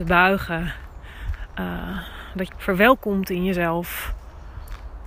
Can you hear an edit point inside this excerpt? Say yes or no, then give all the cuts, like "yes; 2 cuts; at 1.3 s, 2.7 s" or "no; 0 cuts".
yes; 1 cut; at 2.5 s